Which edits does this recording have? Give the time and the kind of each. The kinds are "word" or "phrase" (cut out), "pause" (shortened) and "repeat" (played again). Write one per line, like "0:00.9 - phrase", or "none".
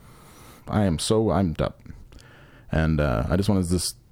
0:01.5 - phrase